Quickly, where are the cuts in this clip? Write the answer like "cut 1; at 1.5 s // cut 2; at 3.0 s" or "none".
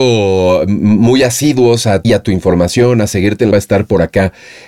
cut 1; at 2.0 s // cut 2; at 3.5 s